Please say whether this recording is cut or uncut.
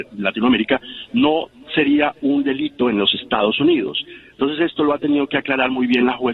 uncut